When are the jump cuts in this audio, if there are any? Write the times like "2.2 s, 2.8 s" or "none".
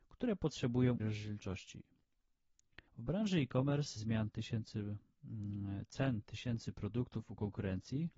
1.0 s, 2.9 s, 4.0 s